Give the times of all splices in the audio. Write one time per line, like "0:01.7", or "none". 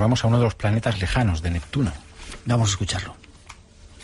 0:00.9